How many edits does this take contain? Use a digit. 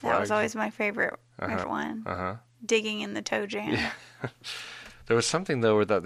1